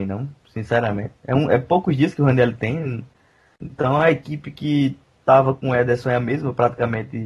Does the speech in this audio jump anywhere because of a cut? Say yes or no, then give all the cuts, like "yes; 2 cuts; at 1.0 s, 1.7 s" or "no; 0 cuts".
no; 0 cuts